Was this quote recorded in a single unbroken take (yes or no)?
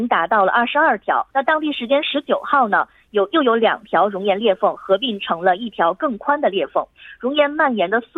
no